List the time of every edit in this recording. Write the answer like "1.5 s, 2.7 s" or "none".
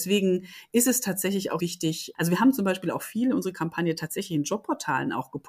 1.6 s

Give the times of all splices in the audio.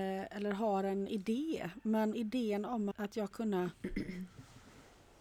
2.1 s, 2.9 s, 3.3 s

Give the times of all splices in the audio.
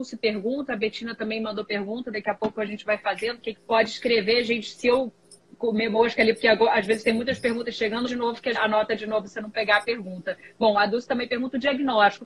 3.5 s, 8.1 s, 8.5 s

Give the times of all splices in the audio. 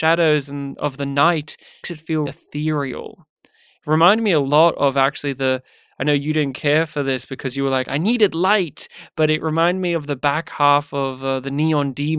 1.8 s, 2.3 s

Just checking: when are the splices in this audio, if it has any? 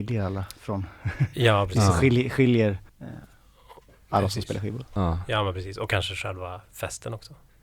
2.9 s

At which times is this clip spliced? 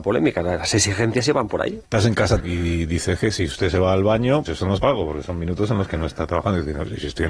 1.9 s, 2.4 s, 4.5 s, 4.8 s

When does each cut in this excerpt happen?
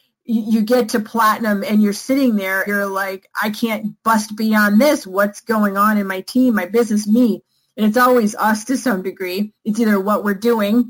2.7 s

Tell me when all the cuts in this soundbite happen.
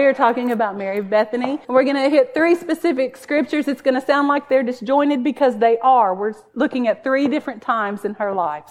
1.6 s

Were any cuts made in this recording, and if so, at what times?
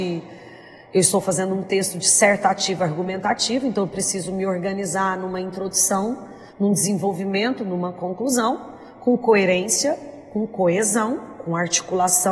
6.5 s

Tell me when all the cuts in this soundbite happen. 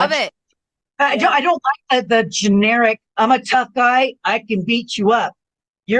3.1 s

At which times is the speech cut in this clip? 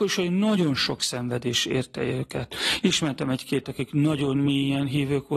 3.6 s

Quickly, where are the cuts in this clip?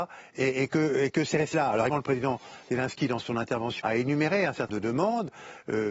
1.5 s, 1.9 s, 3.8 s, 4.7 s

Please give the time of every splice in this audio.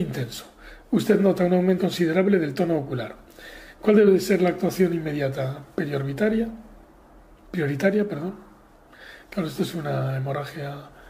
1.8 s, 6.8 s

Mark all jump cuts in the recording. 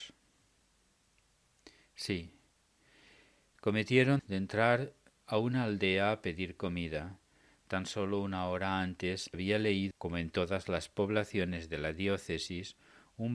4.2 s, 9.3 s, 9.9 s

